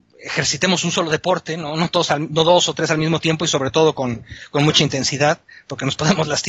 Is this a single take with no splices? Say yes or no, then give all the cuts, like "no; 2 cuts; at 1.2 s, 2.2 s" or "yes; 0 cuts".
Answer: yes; 0 cuts